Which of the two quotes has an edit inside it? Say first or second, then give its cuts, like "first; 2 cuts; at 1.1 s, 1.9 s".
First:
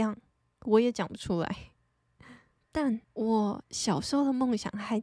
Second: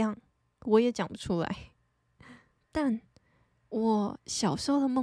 first; 1 cut; at 3.0 s